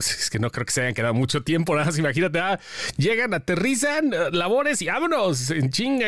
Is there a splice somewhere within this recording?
no; 0 cuts

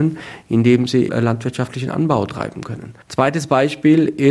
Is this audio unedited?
no; 2 cuts; at 1.1 s, 3.0 s

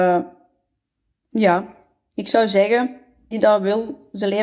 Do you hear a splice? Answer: yes; 1 cut; at 3.3 s

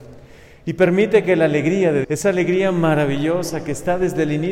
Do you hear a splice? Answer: yes; 1 cut; at 2.0 s

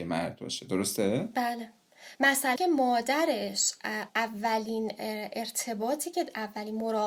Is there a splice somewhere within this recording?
yes; 3 cuts; at 2.1 s, 2.6 s, 4.1 s

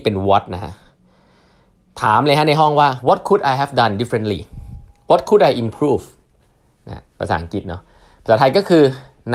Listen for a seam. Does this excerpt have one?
yes; 1 cut; at 3.0 s

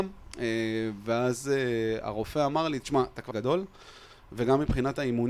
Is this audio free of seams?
no; 1 cut; at 3.3 s

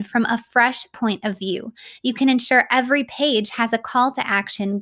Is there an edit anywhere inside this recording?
no; 0 cuts

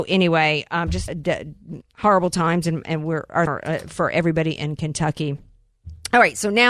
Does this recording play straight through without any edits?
no; 3 cuts; at 1.1 s, 1.8 s, 3.5 s

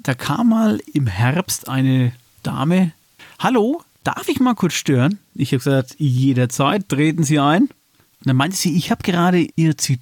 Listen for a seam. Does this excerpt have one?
no; 0 cuts

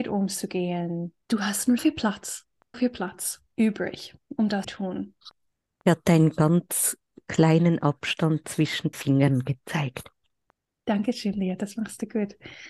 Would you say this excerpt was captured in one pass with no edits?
no; 6 cuts; at 1.2 s, 1.8 s, 2.7 s, 3.5 s, 4.6 s, 8.9 s

